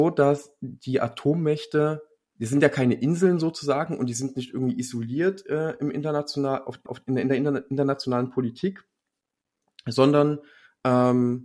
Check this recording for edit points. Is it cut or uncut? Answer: cut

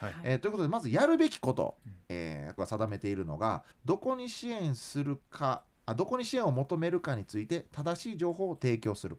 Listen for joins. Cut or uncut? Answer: cut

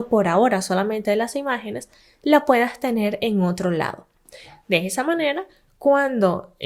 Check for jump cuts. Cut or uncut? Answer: uncut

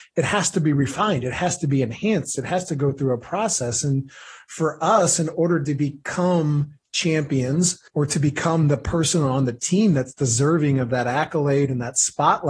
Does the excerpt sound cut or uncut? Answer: cut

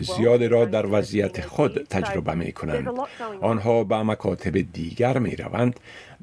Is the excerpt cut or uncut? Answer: uncut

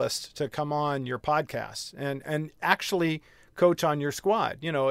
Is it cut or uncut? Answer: uncut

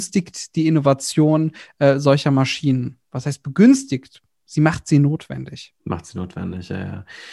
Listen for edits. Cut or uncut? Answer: uncut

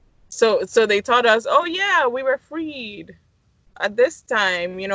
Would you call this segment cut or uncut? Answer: uncut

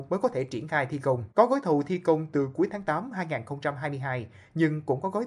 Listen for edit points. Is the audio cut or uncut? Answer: cut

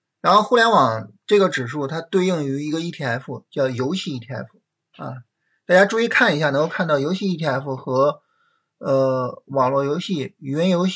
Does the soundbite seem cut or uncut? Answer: uncut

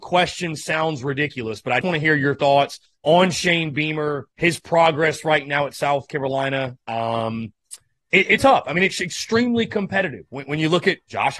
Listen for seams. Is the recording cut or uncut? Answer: cut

